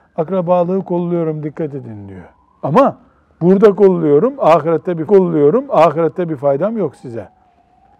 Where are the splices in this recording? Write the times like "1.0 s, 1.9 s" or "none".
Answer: 5.1 s